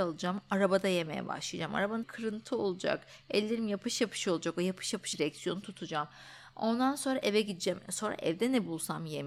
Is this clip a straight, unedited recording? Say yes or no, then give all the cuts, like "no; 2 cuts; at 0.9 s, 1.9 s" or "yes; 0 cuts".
no; 2 cuts; at 2.0 s, 5.1 s